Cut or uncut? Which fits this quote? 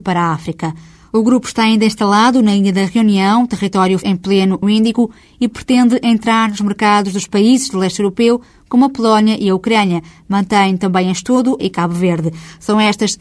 cut